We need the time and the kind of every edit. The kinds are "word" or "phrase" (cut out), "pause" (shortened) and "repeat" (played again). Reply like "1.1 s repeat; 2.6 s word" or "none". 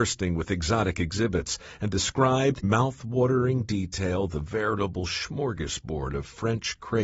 2.6 s word